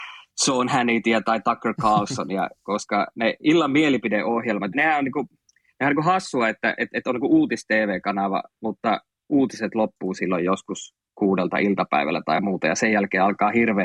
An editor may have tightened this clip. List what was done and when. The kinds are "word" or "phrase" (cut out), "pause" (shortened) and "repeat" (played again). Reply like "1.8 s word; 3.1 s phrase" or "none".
4.7 s word